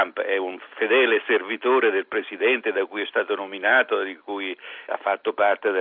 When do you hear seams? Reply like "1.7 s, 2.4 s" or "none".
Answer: 4.9 s